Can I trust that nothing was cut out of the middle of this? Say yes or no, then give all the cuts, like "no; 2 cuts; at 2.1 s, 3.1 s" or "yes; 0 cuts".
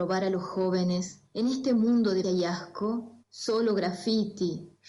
no; 3 cuts; at 1.3 s, 2.2 s, 3.2 s